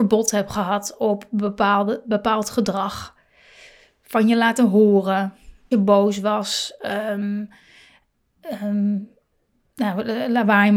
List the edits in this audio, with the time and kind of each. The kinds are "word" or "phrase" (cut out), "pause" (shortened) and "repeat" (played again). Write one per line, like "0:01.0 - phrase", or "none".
0:05.7 - phrase